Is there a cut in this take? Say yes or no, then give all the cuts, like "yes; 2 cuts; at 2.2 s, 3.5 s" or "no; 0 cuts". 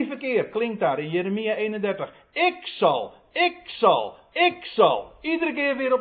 no; 0 cuts